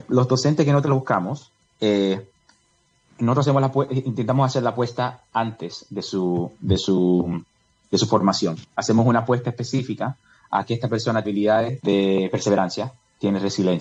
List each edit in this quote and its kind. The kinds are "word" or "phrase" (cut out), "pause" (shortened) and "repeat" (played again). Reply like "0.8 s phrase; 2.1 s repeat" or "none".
11.2 s word; 11.8 s word